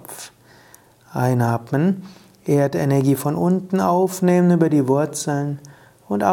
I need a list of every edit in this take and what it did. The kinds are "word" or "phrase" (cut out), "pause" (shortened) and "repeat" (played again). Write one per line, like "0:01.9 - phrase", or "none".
none